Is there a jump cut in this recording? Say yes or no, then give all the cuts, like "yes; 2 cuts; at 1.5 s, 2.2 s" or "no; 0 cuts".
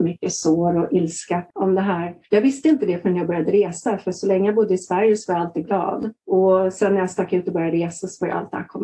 yes; 3 cuts; at 1.5 s, 2.2 s, 6.2 s